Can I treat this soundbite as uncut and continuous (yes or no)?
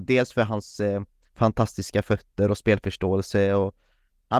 yes